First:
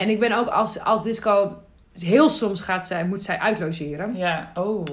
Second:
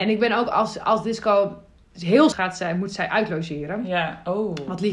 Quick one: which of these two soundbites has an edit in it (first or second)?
second